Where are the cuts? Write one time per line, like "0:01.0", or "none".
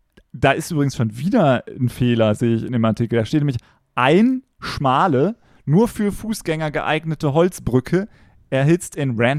none